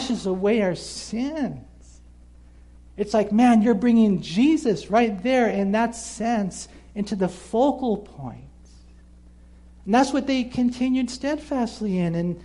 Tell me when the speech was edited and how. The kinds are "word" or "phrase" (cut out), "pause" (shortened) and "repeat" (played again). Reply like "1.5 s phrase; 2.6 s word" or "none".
none